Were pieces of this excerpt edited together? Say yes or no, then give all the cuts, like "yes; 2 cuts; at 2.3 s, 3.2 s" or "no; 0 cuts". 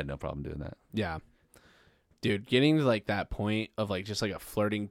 no; 0 cuts